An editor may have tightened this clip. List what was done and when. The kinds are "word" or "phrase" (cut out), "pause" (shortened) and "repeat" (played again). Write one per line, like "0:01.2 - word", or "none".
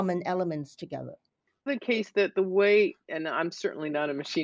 0:01.7 - phrase